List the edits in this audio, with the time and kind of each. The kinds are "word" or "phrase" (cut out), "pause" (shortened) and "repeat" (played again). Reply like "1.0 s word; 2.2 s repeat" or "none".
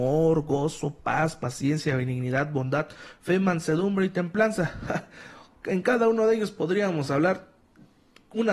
none